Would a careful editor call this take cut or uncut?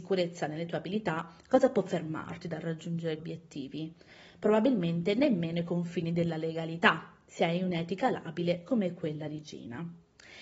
cut